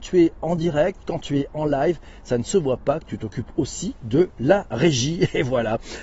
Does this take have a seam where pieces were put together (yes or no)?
no